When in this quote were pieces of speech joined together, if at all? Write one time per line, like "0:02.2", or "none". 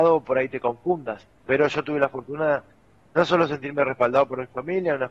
0:03.1